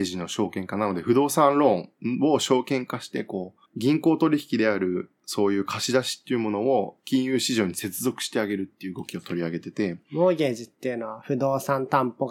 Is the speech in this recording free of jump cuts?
no; 1 cut; at 3.7 s

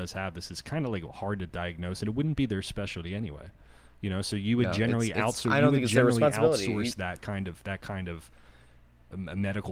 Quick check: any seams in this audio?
no; 0 cuts

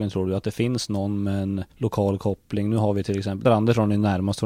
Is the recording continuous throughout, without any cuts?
no; 2 cuts; at 1.7 s, 3.4 s

